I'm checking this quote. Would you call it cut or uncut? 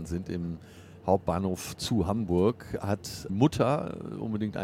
cut